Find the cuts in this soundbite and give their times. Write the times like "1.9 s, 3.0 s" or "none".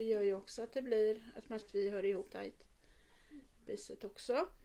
1.6 s, 2.3 s, 3.7 s